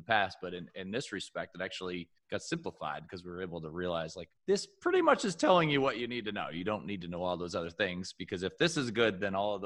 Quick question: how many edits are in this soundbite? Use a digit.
2